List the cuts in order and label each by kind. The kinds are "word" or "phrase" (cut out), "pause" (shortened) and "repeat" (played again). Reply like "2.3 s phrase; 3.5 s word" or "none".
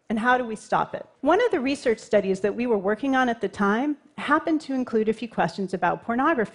1.1 s pause